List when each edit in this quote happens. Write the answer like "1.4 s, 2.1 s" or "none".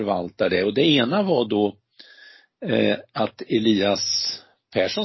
none

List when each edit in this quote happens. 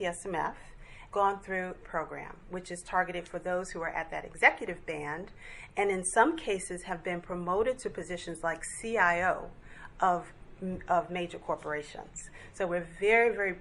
1.1 s, 1.8 s

